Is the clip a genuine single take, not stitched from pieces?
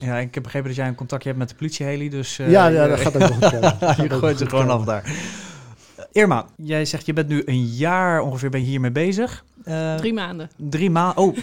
yes; 0 cuts

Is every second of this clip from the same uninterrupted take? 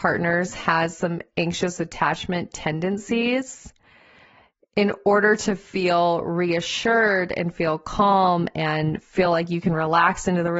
yes; 0 cuts

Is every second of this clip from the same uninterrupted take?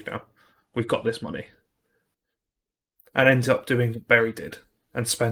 yes; 0 cuts

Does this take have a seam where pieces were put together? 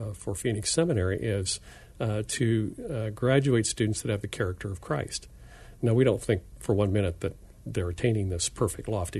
no; 0 cuts

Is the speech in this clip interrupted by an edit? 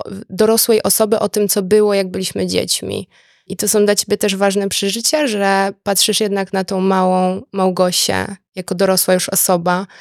no; 0 cuts

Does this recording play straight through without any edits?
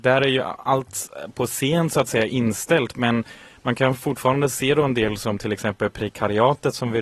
yes; 0 cuts

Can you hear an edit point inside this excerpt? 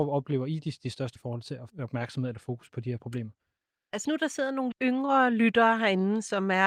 yes; 5 cuts; at 1.2 s, 1.7 s, 2.7 s, 4.0 s, 4.7 s

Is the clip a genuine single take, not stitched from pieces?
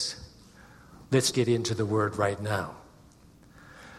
no; 1 cut; at 1.3 s

